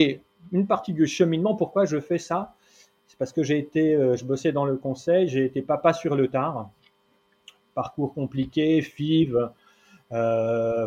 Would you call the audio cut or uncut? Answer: uncut